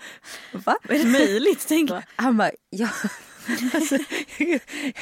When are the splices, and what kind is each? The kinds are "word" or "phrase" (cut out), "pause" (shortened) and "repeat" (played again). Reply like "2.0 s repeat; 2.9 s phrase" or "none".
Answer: 1.0 s word; 1.9 s word